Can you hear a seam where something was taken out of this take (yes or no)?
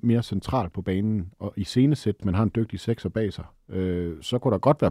yes